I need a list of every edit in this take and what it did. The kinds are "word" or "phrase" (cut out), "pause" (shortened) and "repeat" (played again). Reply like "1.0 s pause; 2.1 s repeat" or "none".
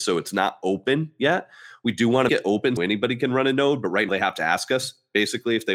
2.3 s word; 2.8 s word; 4.1 s word